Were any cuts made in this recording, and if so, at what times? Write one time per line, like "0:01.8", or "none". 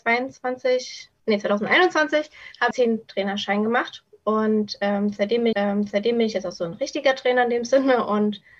0:01.2
0:02.7
0:05.5